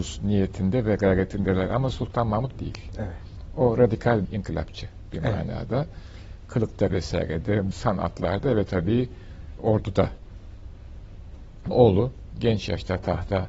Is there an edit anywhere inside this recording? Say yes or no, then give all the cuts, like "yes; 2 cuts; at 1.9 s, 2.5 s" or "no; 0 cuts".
yes; 6 cuts; at 2.5 s, 4.2 s, 6.9 s, 7.7 s, 9.6 s, 11.7 s